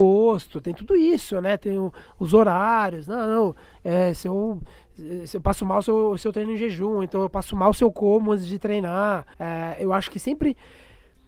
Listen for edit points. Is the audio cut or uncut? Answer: cut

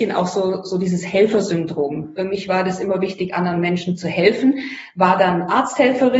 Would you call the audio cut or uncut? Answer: uncut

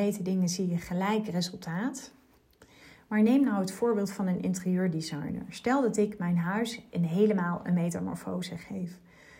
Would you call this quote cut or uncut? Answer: uncut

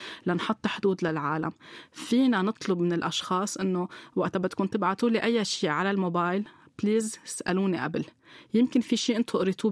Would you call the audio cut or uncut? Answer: uncut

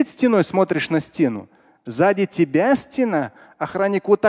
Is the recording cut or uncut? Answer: uncut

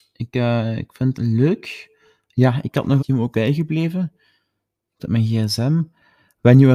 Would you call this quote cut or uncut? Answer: cut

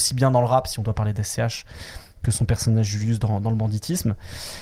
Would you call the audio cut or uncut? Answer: uncut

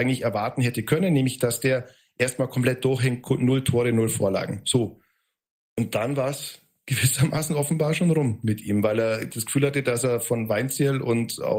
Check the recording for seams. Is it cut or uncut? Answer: uncut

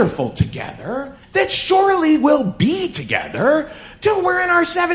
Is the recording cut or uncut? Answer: cut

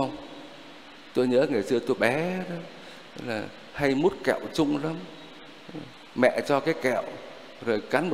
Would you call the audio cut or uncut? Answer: cut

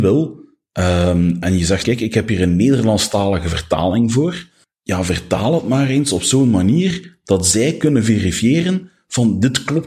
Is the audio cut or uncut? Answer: cut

